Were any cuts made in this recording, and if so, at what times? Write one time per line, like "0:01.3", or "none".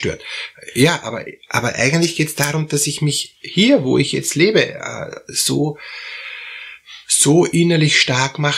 none